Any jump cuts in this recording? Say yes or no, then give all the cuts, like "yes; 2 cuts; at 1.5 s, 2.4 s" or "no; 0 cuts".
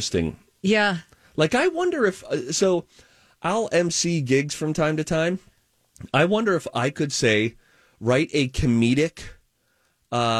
no; 0 cuts